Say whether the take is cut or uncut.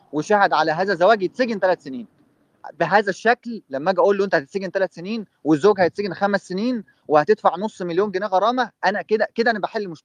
uncut